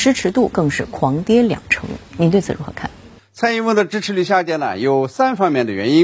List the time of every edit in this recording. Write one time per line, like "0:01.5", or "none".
none